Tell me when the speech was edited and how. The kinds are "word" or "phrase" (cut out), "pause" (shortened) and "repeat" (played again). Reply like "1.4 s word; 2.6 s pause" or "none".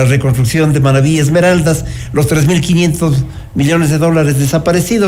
none